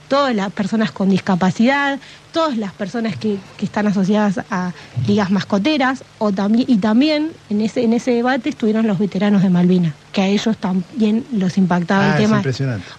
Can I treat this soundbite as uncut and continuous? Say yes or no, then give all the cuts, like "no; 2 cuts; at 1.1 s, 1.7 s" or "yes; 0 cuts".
no; 1 cut; at 10.0 s